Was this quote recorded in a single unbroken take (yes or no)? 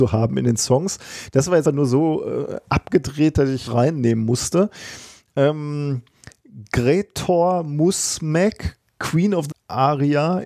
no